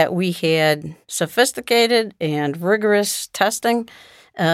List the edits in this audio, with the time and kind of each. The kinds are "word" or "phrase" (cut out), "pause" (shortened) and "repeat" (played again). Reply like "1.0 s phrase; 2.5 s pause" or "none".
1.0 s pause